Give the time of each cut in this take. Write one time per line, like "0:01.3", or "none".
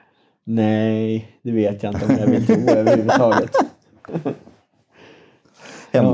none